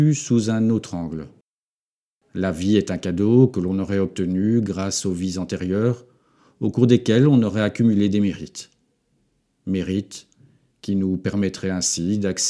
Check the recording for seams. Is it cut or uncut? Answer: uncut